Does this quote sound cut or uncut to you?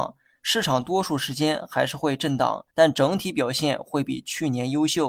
cut